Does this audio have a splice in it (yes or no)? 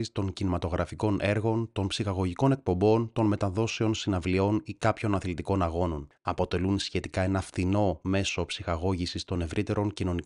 yes